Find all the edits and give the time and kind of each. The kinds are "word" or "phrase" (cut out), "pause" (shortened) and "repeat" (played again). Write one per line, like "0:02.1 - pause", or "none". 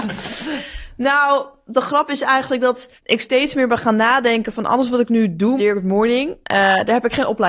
0:03.0 - pause
0:05.6 - word
0:06.4 - pause